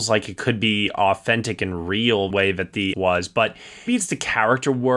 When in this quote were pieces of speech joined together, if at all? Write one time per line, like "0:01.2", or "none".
0:02.3
0:02.9
0:03.9